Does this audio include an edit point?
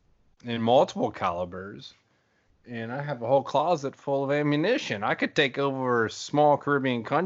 no; 0 cuts

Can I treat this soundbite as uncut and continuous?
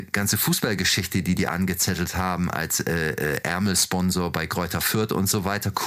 yes; 0 cuts

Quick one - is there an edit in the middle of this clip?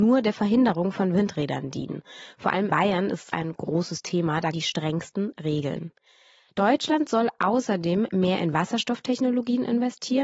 yes; 3 cuts; at 2.7 s, 3.3 s, 4.5 s

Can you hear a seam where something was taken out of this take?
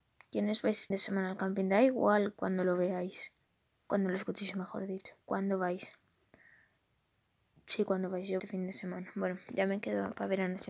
yes; 5 cuts; at 0.9 s, 3.4 s, 5.2 s, 6.8 s, 8.4 s

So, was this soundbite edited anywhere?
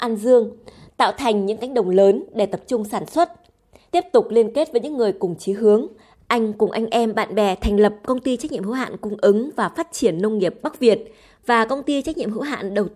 no; 0 cuts

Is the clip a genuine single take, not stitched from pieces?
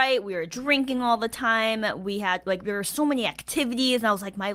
yes; 0 cuts

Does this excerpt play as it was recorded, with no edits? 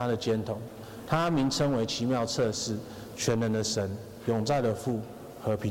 yes; 0 cuts

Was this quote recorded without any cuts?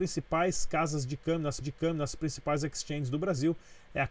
no; 1 cut; at 1.6 s

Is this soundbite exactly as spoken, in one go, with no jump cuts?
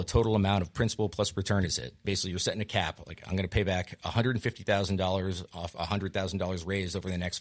no; 2 cuts; at 2.0 s, 5.7 s

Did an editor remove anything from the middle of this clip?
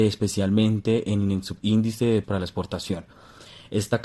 yes; 1 cut; at 2.2 s

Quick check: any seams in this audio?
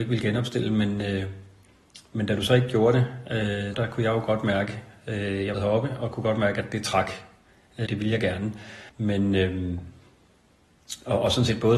yes; 4 cuts; at 3.7 s, 5.5 s, 7.9 s, 8.9 s

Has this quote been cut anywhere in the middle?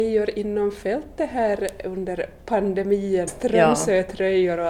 yes; 1 cut; at 3.3 s

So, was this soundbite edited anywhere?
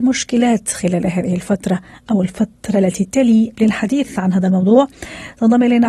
yes; 1 cut; at 3.6 s

